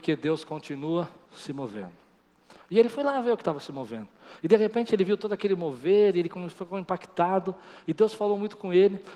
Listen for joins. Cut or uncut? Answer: cut